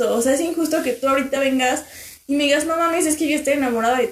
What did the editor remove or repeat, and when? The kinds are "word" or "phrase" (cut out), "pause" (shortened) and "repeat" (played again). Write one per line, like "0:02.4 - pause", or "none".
none

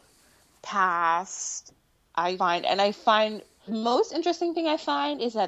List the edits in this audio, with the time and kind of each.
0:02.4 - word
0:03.7 - word

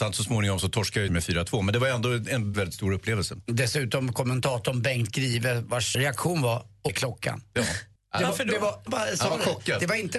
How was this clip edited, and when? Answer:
0:01.1 - phrase
0:02.5 - word
0:05.9 - word
0:06.9 - word
0:08.0 - pause
0:08.9 - word

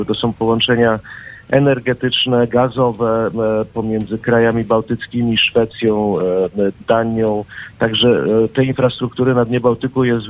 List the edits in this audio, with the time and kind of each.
none

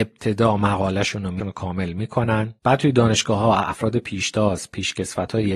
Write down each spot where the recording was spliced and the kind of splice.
0:01.4 - phrase
0:02.6 - pause

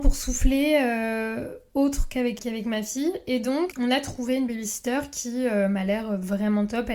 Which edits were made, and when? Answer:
0:02.4 - word
0:03.7 - word

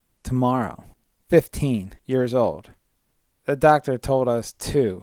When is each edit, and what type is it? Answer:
none

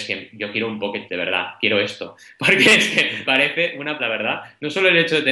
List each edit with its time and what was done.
0:01.1 - word
0:03.2 - word
0:04.0 - word

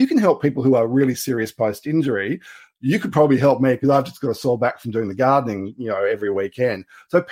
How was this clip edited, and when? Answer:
none

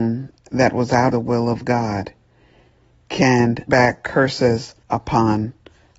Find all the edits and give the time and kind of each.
0:01.1 - word
0:03.7 - word
0:04.8 - pause

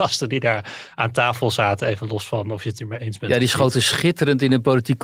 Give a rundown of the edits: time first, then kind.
none

